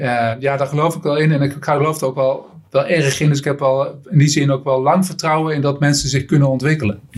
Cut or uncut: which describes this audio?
uncut